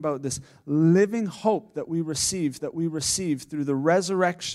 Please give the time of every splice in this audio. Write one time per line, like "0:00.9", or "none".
0:02.6